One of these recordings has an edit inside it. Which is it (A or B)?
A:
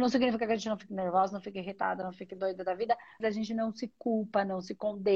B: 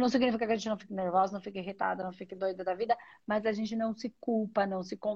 A